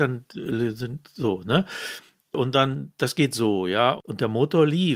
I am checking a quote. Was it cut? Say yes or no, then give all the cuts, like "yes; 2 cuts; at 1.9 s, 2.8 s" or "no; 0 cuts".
no; 0 cuts